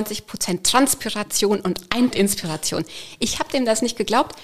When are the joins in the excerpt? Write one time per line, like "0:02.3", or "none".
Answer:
0:02.1